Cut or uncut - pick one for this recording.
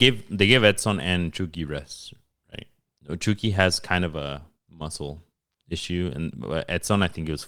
uncut